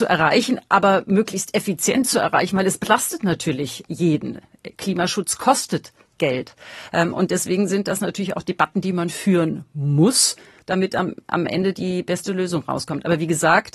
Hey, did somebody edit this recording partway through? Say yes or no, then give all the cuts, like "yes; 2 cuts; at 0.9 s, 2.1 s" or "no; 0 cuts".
no; 0 cuts